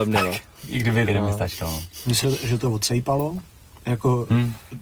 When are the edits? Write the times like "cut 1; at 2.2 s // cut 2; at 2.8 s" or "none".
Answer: cut 1; at 1.1 s // cut 2; at 2.2 s